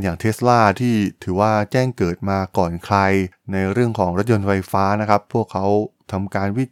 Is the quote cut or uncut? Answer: uncut